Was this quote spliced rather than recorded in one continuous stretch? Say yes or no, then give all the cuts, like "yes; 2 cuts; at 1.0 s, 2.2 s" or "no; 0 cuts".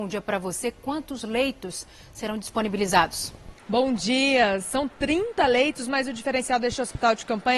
yes; 1 cut; at 3.6 s